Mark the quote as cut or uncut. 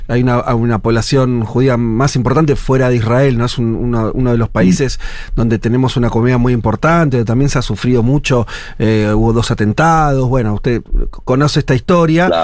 uncut